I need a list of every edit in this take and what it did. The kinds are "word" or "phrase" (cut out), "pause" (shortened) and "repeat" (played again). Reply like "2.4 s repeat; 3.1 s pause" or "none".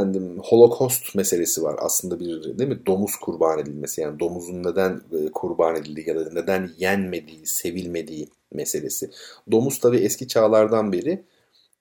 none